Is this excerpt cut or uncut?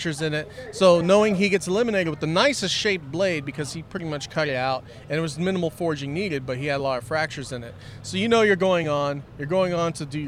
uncut